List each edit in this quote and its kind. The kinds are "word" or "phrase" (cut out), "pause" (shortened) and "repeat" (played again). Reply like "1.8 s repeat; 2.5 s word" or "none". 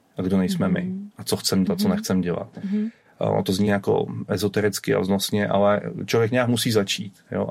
1.7 s word; 3.7 s word